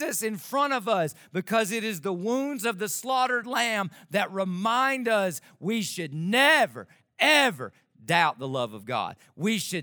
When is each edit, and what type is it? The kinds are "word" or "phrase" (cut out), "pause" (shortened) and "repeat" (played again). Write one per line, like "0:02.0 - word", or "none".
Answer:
none